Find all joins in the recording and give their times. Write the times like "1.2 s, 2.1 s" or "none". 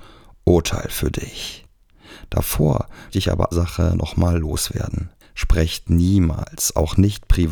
3.1 s, 3.5 s, 5.2 s